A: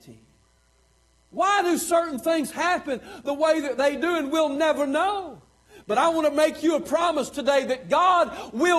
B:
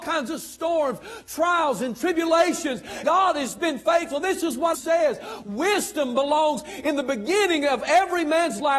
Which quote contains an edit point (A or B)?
B